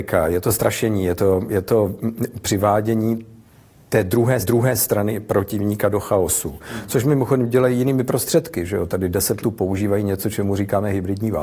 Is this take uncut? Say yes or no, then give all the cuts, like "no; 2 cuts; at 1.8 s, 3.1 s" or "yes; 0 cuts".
no; 2 cuts; at 4.4 s, 9.4 s